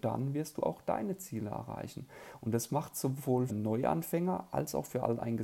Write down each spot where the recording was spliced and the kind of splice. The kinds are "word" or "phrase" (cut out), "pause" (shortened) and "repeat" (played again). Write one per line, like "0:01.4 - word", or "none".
0:03.5 - word